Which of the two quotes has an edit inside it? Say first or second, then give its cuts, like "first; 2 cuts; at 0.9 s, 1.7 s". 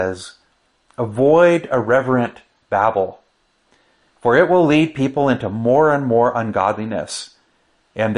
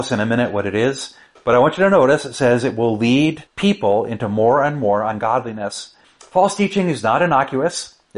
second; 3 cuts; at 1.3 s, 3.5 s, 6.0 s